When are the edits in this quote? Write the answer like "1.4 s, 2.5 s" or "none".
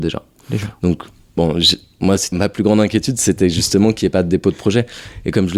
2.3 s